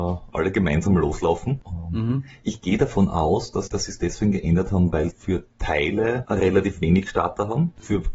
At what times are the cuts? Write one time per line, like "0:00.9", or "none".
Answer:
0:03.7
0:05.1